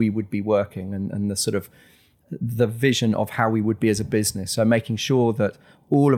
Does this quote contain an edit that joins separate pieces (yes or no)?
no